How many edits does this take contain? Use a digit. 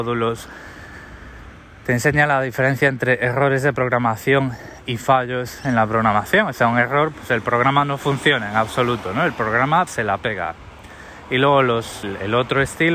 3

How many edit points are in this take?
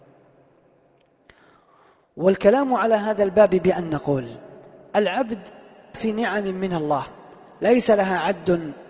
1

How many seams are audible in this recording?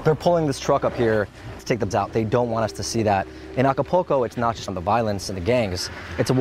3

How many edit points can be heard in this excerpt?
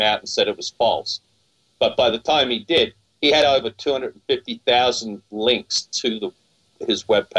0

